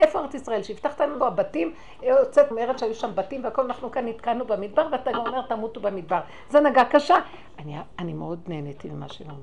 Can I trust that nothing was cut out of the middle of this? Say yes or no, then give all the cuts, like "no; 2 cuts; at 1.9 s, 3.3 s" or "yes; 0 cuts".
no; 2 cuts; at 1.2 s, 2.5 s